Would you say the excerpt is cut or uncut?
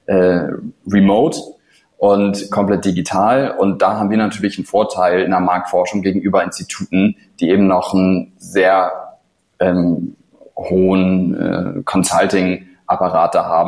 uncut